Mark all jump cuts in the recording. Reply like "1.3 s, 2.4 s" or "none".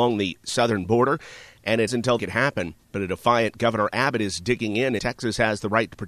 1.9 s, 2.2 s, 2.8 s, 5.0 s

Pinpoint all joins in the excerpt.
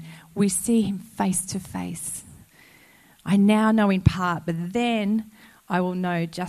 none

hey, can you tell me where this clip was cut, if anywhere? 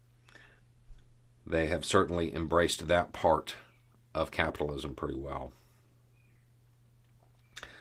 none

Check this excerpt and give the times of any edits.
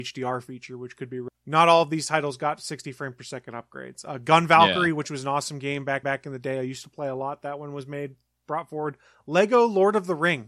6.0 s

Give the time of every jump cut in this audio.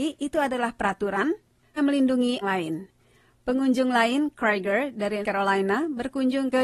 1.8 s, 2.4 s, 4.4 s, 5.2 s

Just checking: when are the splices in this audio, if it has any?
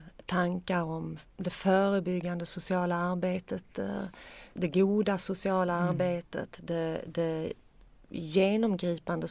none

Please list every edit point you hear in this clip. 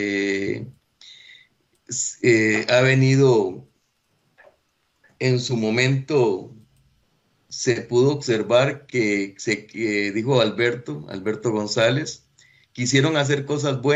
none

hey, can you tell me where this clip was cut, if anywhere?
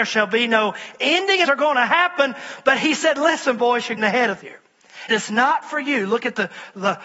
1.4 s, 4.0 s, 4.4 s, 5.1 s

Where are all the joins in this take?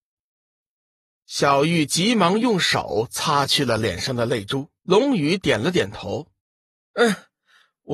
4.8 s, 6.4 s

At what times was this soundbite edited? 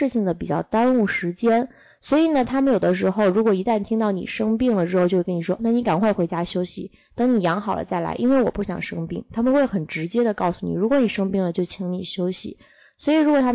5.6 s

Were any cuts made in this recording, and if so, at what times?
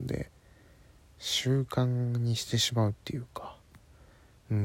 none

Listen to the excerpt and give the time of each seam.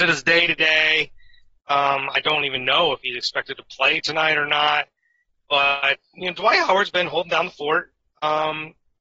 none

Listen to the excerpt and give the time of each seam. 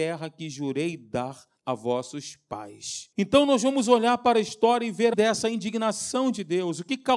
1.6 s, 3.1 s, 5.1 s

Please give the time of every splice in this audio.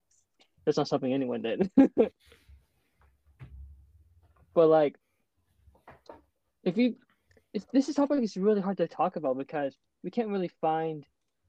none

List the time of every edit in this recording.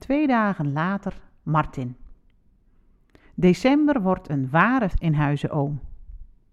4.9 s

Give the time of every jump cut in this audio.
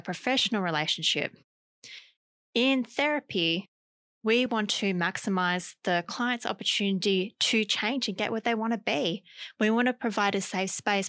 none

